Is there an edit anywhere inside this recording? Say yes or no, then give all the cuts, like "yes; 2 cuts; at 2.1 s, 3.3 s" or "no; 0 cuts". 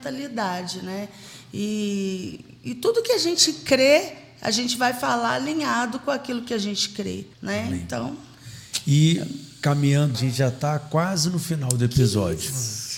yes; 2 cuts; at 7.3 s, 10.1 s